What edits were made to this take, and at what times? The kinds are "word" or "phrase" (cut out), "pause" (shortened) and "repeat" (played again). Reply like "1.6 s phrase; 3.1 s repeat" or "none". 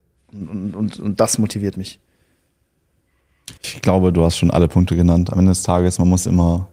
3.6 s pause